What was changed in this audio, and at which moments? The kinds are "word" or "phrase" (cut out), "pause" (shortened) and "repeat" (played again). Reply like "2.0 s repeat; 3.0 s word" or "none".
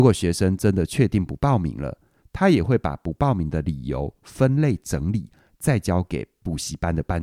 none